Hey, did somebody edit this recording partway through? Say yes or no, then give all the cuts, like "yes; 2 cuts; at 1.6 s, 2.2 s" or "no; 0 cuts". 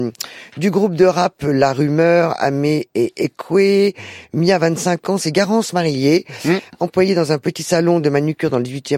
no; 0 cuts